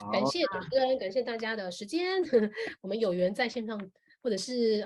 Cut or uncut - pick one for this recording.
uncut